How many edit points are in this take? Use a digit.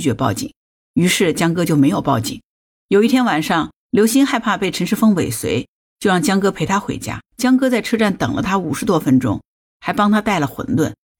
1